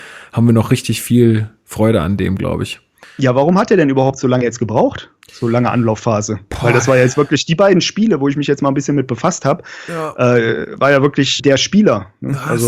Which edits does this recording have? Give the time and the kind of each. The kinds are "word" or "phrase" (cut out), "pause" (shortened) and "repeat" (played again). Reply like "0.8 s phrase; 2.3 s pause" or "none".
3.0 s pause; 11.4 s word

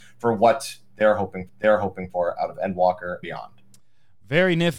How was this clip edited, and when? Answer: 1.5 s repeat; 3.2 s word

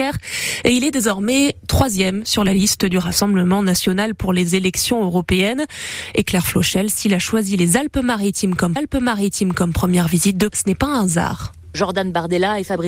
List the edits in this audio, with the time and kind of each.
8.8 s repeat; 10.5 s word

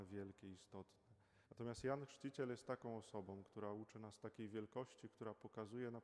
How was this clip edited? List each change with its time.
1.4 s pause

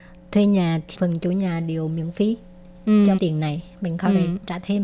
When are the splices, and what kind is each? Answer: 0.9 s word; 3.2 s phrase

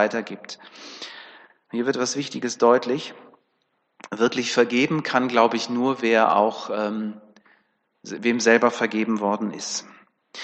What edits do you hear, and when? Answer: none

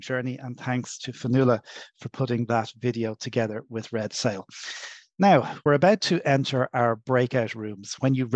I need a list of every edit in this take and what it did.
none

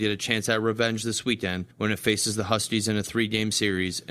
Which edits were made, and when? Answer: 1.7 s pause

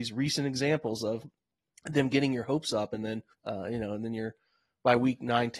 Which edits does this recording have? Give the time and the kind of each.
3.3 s pause

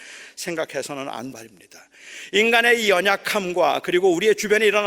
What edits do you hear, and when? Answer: 1.3 s word

